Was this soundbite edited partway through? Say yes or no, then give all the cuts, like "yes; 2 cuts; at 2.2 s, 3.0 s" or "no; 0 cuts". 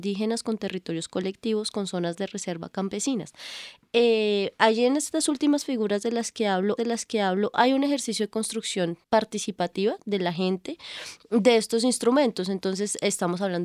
yes; 2 cuts; at 6.8 s, 9.0 s